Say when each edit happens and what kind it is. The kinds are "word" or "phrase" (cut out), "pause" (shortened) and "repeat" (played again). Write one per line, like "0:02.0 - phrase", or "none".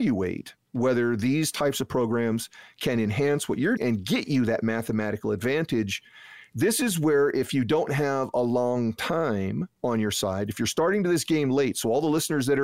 0:03.8 - word